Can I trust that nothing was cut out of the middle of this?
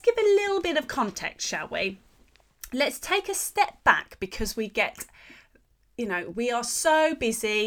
yes; 0 cuts

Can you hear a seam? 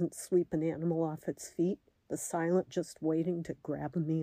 yes; 2 cuts; at 1.9 s, 2.7 s

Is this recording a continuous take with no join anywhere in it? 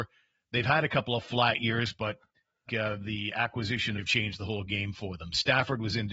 no; 2 cuts; at 2.7 s, 4.0 s

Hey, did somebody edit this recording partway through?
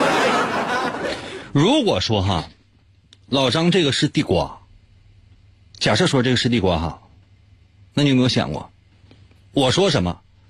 no; 0 cuts

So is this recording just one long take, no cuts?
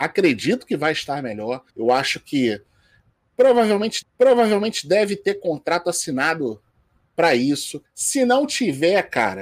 no; 3 cuts; at 1.7 s, 4.0 s, 7.8 s

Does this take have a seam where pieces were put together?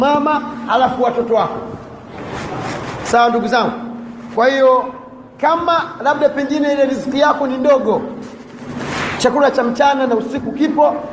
no; 0 cuts

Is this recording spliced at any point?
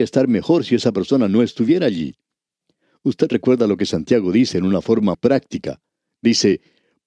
yes; 1 cut; at 5.1 s

